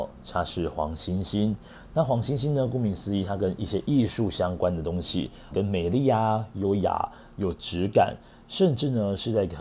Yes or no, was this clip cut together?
yes